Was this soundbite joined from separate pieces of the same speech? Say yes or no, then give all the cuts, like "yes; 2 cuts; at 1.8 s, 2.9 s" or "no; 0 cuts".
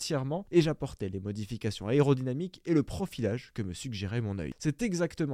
no; 0 cuts